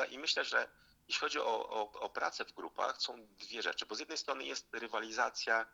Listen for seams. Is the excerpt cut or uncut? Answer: uncut